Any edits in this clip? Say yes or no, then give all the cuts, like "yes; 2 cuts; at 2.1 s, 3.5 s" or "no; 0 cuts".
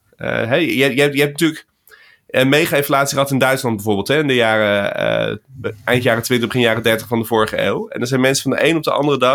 no; 0 cuts